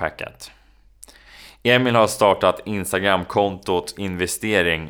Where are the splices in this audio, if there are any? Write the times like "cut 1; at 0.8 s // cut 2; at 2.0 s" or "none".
cut 1; at 3.9 s